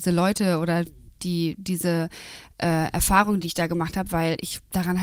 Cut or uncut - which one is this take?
uncut